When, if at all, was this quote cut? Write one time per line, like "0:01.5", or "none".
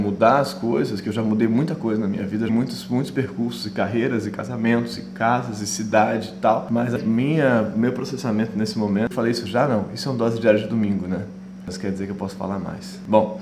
0:02.5
0:07.0
0:09.1